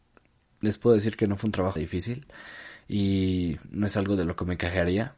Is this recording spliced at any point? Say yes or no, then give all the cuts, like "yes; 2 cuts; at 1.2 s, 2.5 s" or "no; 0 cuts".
yes; 1 cut; at 1.8 s